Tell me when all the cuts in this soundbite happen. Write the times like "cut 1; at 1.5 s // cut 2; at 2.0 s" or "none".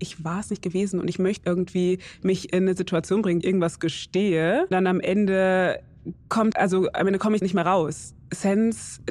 cut 1; at 1.4 s // cut 2; at 3.4 s // cut 3; at 4.7 s // cut 4; at 6.5 s // cut 5; at 7.4 s